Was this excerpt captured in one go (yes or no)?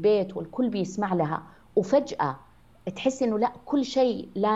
yes